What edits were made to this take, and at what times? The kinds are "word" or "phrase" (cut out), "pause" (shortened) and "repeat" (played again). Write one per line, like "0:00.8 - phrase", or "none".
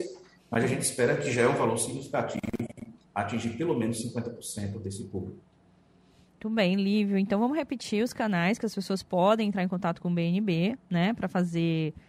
none